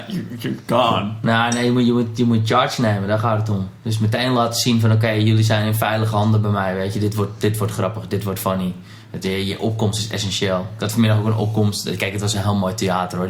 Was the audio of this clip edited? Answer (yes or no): no